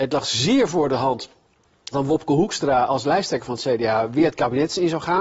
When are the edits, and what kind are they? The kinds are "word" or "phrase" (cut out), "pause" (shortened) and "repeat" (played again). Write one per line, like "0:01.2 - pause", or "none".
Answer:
0:01.9 - word